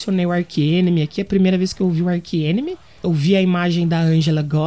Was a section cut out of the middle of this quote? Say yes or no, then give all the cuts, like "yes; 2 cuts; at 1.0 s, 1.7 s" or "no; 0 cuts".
no; 0 cuts